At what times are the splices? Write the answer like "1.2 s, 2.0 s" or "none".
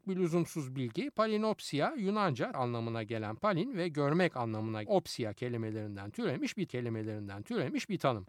2.5 s, 4.9 s, 6.7 s